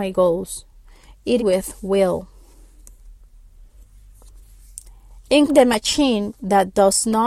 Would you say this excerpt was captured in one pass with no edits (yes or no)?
no